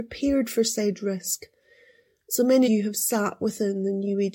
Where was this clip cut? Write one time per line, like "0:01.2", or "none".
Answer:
0:02.6